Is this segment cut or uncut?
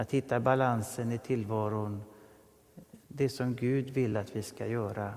uncut